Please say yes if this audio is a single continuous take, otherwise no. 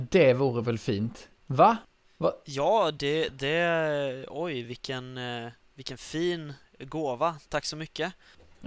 yes